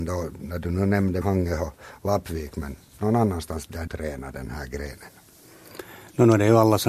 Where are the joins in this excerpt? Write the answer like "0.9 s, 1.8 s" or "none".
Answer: 1.2 s, 3.9 s